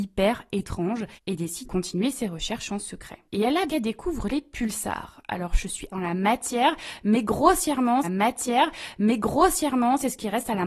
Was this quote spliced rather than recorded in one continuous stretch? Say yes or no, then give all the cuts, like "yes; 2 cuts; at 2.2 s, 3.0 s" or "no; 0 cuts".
yes; 6 cuts; at 1.1 s, 1.6 s, 3.3 s, 3.7 s, 5.9 s, 8.0 s